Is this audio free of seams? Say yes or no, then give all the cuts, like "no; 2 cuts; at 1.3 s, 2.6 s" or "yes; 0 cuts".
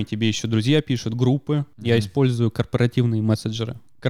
yes; 0 cuts